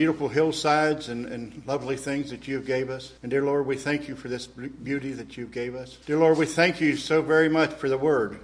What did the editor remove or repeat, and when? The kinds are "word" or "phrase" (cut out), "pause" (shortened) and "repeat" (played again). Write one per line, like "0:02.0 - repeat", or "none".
0:03.2 - pause
0:06.0 - pause